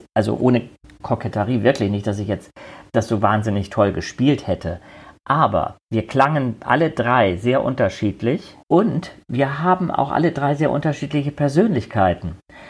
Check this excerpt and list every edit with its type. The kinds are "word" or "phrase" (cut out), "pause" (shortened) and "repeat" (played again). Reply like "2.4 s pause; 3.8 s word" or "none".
5.8 s pause; 8.6 s pause